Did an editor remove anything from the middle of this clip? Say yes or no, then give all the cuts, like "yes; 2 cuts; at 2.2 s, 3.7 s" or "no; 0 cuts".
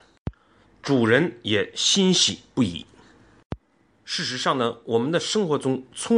no; 0 cuts